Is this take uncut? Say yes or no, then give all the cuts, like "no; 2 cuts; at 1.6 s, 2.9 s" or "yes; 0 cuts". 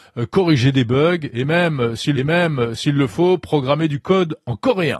no; 1 cut; at 2.1 s